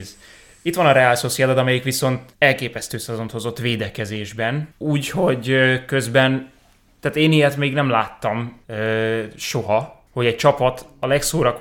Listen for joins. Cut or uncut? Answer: cut